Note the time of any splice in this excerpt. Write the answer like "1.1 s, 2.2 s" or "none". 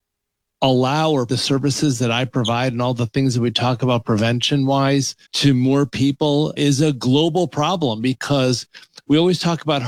1.3 s, 5.2 s, 6.6 s